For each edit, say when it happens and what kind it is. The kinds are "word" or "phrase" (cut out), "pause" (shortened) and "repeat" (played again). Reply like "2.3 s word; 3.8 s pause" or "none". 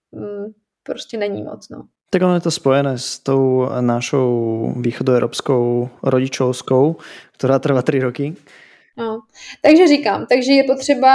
none